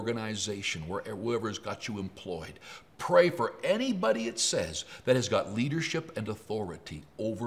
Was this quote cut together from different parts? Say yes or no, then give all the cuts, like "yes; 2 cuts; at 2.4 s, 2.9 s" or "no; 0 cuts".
no; 0 cuts